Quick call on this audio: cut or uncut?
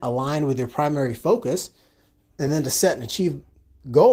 uncut